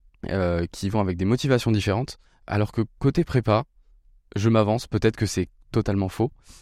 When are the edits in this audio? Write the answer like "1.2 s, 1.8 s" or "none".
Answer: none